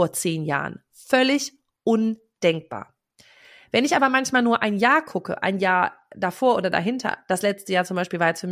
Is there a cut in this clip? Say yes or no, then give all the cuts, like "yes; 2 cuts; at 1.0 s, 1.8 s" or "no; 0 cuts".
no; 0 cuts